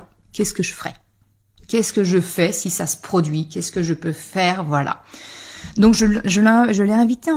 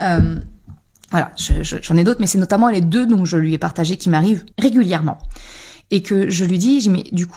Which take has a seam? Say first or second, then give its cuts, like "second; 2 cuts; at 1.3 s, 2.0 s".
second; 1 cut; at 4.5 s